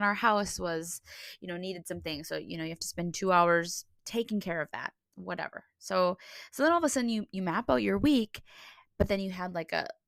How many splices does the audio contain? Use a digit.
0